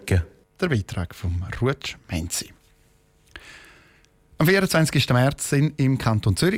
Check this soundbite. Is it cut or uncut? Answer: uncut